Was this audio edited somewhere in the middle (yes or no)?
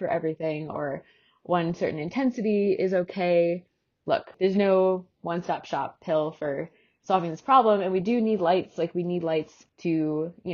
no